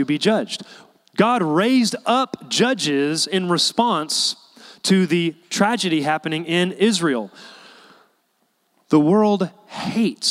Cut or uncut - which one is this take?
uncut